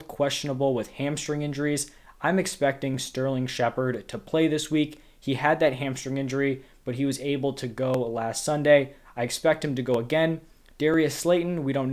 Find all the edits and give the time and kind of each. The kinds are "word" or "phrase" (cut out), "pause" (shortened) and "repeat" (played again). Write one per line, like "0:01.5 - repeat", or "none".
none